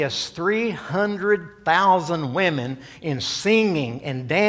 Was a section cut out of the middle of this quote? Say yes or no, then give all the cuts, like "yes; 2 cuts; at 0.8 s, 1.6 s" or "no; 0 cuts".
no; 0 cuts